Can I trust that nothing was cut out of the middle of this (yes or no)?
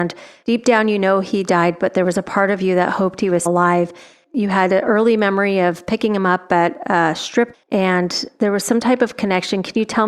no